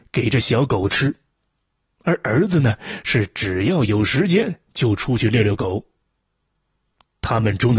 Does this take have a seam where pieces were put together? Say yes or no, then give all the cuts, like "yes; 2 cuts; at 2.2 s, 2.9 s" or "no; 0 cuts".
no; 0 cuts